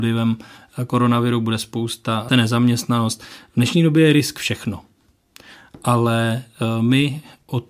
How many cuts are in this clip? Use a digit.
1